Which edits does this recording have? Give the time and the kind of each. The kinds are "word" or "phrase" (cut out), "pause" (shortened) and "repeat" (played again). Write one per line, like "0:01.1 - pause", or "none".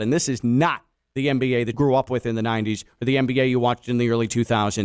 0:01.7 - word